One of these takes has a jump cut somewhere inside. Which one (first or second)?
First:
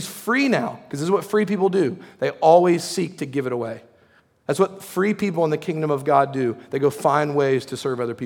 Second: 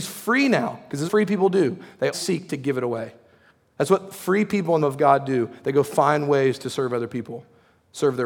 second